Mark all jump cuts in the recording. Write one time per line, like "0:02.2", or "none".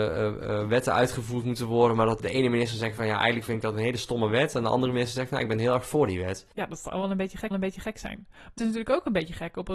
0:02.2
0:06.5
0:07.5
0:08.6